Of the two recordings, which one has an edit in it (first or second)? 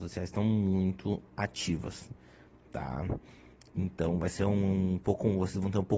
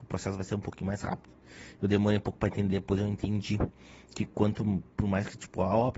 second